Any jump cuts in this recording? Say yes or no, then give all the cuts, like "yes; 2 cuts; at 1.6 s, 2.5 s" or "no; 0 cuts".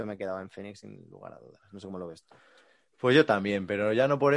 no; 0 cuts